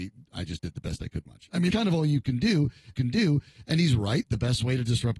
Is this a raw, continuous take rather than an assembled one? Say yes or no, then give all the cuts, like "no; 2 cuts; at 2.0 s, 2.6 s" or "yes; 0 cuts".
no; 3 cuts; at 1.3 s, 1.7 s, 2.9 s